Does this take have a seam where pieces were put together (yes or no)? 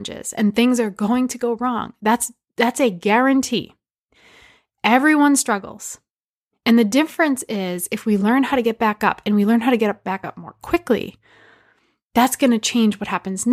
no